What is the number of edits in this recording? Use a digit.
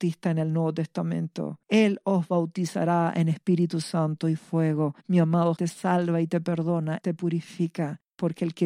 4